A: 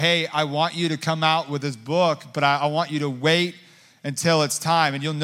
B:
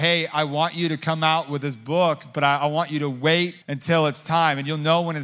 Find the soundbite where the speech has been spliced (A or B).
B